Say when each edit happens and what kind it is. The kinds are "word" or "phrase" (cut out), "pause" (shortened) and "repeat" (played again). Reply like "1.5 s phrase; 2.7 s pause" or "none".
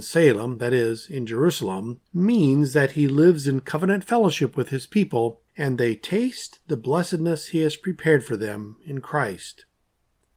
2.1 s pause; 5.5 s pause